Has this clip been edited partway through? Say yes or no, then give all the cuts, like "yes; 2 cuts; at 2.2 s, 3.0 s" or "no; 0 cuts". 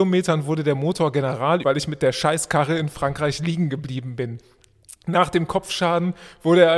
yes; 1 cut; at 1.6 s